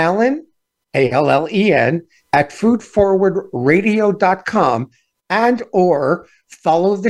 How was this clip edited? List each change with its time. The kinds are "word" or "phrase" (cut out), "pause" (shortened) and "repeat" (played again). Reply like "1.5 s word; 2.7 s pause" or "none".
none